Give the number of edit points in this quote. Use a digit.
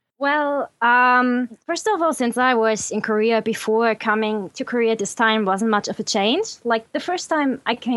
1